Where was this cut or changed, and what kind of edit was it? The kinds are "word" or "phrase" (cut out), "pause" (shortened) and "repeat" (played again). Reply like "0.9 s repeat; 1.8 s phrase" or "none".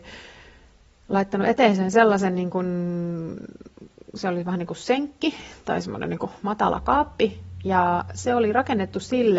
none